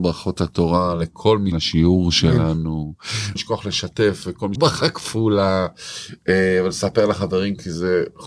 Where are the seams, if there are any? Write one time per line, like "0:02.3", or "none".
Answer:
0:01.5
0:03.4
0:04.6